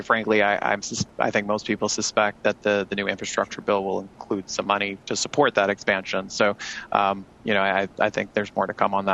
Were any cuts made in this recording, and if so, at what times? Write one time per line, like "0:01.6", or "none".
0:05.0

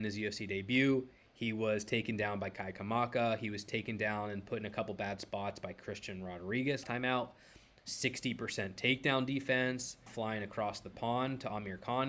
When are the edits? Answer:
0:06.8
0:10.1

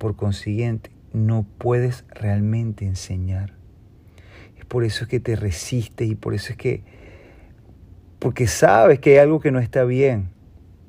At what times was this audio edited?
none

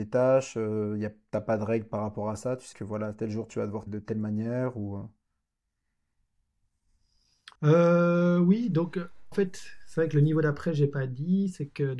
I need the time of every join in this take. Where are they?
0:02.7
0:03.9
0:07.5
0:09.3

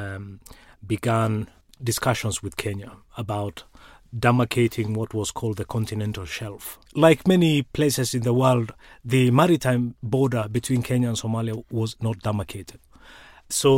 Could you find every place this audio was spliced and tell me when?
none

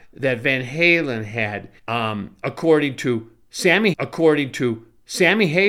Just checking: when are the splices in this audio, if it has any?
0:01.8
0:03.9

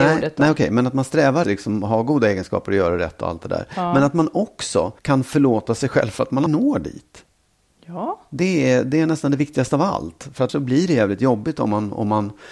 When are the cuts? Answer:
0:01.4
0:05.0
0:06.5
0:10.5

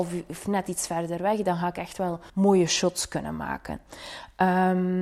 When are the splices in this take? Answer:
0:02.3

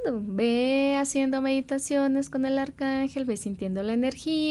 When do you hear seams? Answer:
none

